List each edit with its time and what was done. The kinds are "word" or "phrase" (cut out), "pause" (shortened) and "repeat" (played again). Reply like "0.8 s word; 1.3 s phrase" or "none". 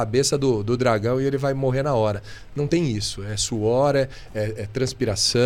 none